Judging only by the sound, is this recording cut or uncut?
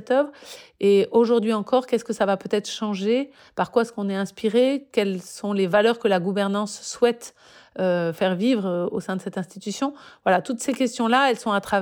uncut